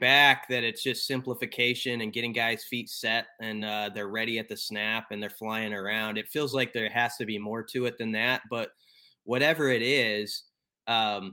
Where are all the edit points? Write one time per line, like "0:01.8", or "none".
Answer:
none